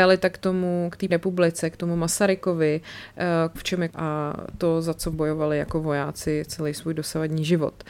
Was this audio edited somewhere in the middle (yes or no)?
yes